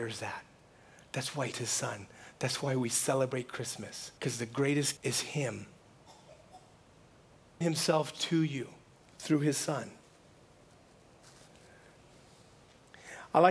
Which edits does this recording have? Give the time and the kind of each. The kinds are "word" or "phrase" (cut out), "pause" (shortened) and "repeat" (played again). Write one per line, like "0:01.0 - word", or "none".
0:01.5 - word
0:04.2 - pause
0:05.0 - word
0:07.6 - word
0:09.0 - pause